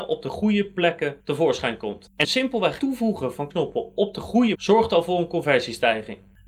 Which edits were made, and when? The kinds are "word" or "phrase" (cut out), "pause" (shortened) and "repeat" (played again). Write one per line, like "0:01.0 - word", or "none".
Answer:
0:01.2 - pause
0:02.2 - word
0:02.8 - word
0:03.5 - word
0:04.5 - word